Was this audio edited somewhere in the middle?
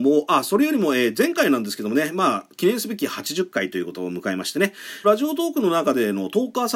yes; 1 cut; at 5.0 s

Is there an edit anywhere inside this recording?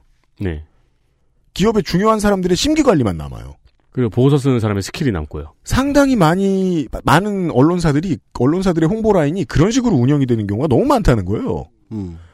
no; 0 cuts

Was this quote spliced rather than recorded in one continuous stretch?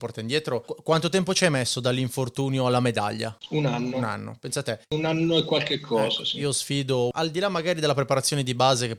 yes; 1 cut; at 4.8 s

